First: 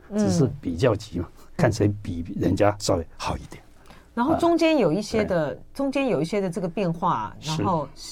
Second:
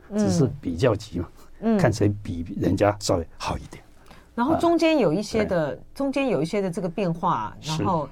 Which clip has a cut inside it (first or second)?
first